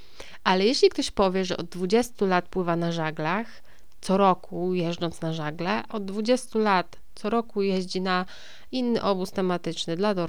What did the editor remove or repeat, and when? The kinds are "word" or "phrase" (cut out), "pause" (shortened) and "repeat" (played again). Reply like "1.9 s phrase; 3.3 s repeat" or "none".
5.9 s phrase